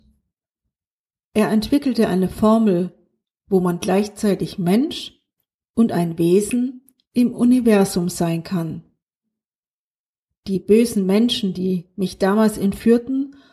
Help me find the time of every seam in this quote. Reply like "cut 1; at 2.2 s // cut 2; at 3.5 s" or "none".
none